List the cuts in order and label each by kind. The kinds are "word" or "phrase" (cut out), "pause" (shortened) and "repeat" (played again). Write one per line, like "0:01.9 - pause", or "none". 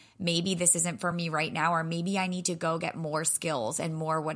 none